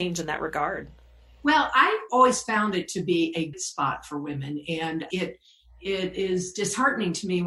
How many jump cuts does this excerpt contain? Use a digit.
3